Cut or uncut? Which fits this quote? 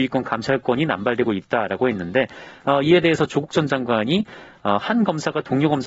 uncut